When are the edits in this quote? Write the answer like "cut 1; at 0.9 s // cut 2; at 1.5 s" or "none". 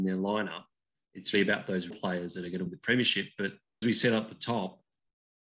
cut 1; at 1.3 s // cut 2; at 1.9 s // cut 3; at 2.7 s // cut 4; at 3.8 s